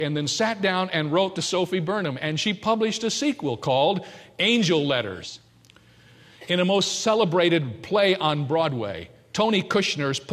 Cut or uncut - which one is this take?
cut